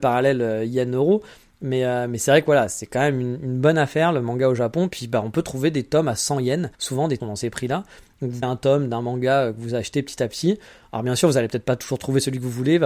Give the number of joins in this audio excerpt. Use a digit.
3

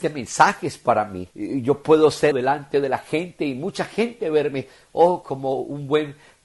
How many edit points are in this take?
3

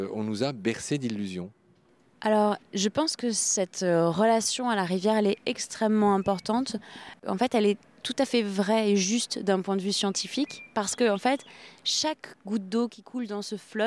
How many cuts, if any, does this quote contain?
0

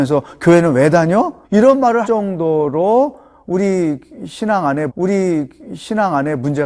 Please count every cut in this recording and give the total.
3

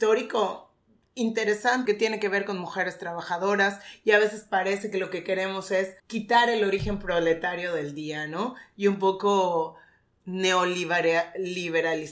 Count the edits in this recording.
2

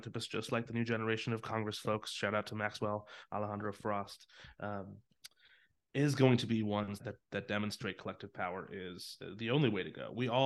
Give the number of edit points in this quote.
1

